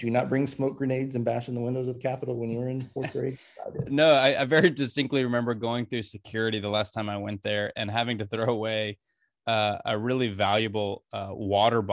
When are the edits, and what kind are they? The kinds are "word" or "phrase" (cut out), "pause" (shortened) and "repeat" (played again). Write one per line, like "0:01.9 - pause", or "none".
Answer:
none